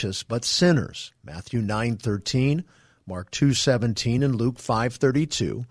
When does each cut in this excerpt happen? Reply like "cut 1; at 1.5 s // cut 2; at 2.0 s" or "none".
none